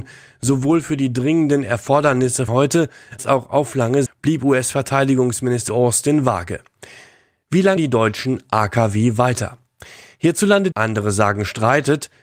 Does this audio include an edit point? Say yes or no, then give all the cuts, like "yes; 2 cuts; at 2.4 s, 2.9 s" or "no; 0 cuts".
yes; 6 cuts; at 2.5 s, 3.2 s, 4.1 s, 5.7 s, 7.8 s, 10.7 s